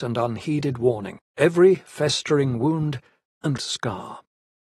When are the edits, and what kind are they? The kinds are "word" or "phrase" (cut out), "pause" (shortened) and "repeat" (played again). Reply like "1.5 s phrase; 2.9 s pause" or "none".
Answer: 1.3 s pause; 3.6 s word